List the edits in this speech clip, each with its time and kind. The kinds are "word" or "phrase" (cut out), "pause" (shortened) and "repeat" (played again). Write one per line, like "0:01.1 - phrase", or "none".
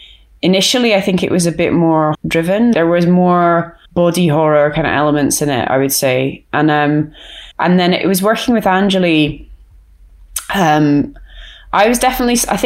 0:02.1 - word
0:02.7 - word
0:03.9 - pause
0:07.5 - pause